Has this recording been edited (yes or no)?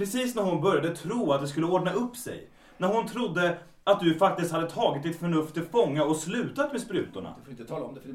no